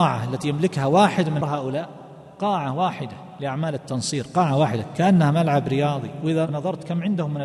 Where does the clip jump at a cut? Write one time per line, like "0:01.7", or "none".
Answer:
0:01.4